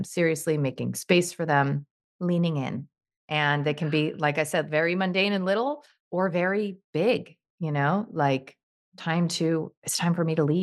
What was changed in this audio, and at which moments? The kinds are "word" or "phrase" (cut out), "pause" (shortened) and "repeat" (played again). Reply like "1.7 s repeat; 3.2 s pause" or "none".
none